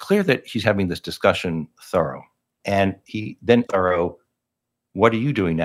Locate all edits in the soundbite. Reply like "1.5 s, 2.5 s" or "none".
1.7 s, 3.0 s, 3.7 s